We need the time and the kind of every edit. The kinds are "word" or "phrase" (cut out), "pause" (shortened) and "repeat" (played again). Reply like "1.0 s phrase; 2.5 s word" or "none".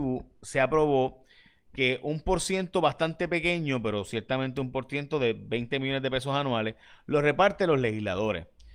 none